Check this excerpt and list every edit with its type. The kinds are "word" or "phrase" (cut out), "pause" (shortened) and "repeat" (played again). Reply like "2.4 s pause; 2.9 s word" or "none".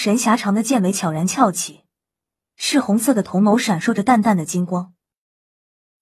none

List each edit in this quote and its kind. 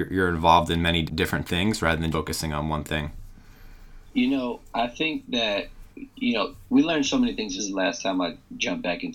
1.1 s word; 2.1 s word; 4.1 s pause; 4.6 s pause; 5.9 s pause; 7.6 s phrase

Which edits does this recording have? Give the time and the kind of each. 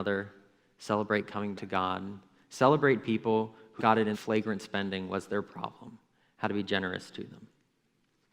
1.5 s word; 3.8 s word; 4.1 s phrase

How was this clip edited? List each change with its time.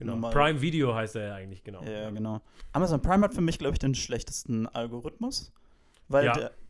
none

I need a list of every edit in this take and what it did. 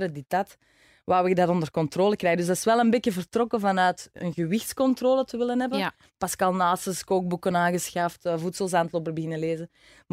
none

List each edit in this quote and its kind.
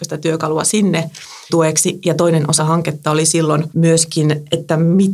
1.5 s word; 2.6 s word; 3.7 s word

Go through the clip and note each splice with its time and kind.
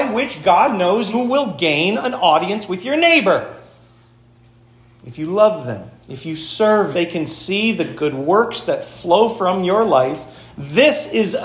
1.1 s word; 6.0 s pause; 6.9 s phrase

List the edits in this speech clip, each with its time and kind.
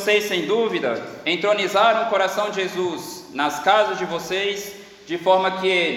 none

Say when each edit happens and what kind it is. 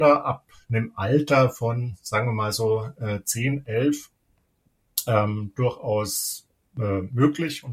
none

